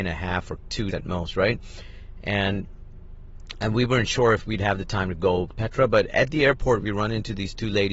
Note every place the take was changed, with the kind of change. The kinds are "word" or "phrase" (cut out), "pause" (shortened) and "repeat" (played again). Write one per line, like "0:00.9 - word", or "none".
0:00.9 - word
0:05.5 - word